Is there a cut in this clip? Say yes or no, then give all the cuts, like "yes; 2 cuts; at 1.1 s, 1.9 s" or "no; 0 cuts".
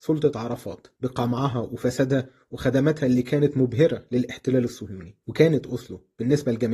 no; 0 cuts